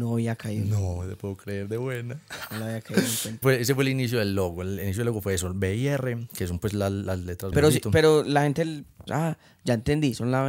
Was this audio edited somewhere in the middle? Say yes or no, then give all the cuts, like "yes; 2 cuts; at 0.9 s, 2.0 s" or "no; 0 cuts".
yes; 3 cuts; at 3.4 s, 7.5 s, 9.1 s